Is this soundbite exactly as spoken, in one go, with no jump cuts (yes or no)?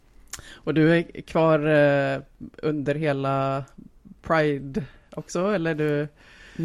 yes